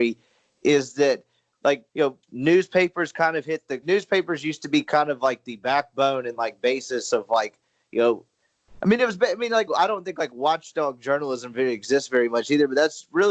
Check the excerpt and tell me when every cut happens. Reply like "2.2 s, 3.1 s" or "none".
1.9 s, 2.2 s, 3.8 s, 9.7 s

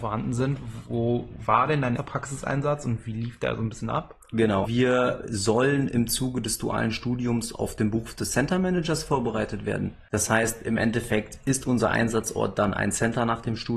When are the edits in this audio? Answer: 2.0 s, 4.7 s

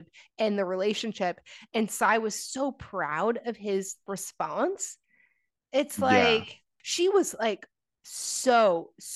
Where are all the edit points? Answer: none

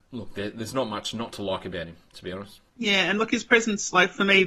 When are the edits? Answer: 2.7 s

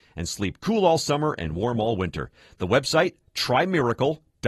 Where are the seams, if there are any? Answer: none

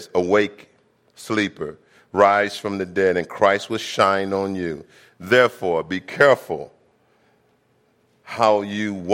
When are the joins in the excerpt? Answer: none

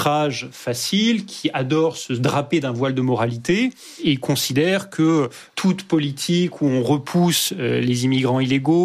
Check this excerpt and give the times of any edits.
none

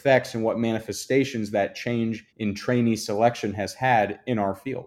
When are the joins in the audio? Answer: 2.3 s

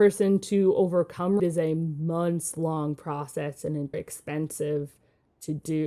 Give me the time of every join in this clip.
1.4 s, 3.9 s

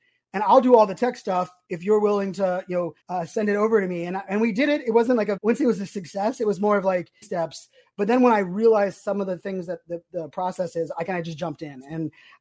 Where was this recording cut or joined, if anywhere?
3.0 s, 5.4 s, 7.2 s

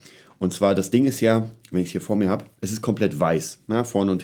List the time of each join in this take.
none

